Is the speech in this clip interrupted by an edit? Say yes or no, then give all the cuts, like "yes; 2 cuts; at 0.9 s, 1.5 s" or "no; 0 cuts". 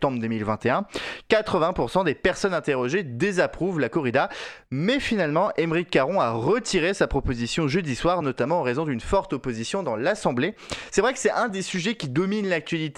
no; 0 cuts